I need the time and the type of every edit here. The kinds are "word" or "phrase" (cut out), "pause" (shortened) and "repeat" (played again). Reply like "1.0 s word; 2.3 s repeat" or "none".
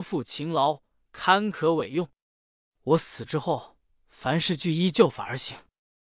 3.9 s pause